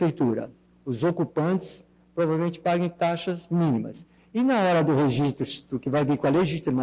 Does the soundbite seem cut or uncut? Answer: uncut